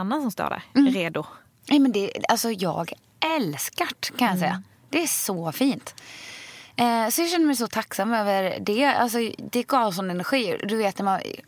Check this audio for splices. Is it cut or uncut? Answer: uncut